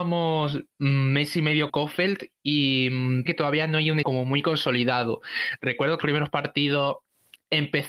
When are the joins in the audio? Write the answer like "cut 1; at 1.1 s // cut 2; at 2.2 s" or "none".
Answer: cut 1; at 1.7 s // cut 2; at 3.3 s // cut 3; at 4.0 s // cut 4; at 6.0 s